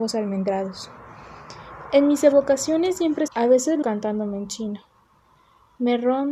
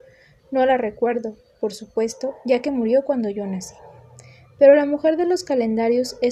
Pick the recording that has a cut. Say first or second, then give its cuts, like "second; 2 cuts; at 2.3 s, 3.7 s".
first; 2 cuts; at 3.3 s, 3.8 s